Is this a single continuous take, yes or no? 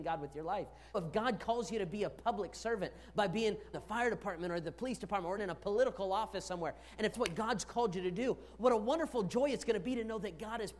no